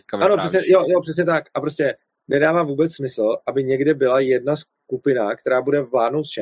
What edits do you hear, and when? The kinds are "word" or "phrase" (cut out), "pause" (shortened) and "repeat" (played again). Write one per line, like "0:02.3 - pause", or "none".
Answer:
none